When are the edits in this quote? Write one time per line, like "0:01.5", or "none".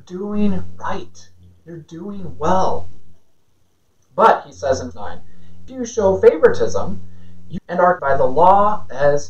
0:04.9
0:05.7
0:07.6
0:08.0